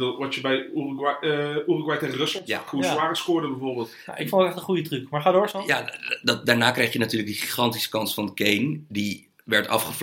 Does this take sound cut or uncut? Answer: uncut